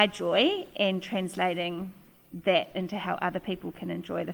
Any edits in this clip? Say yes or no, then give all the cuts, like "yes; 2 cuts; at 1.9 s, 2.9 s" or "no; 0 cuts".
no; 0 cuts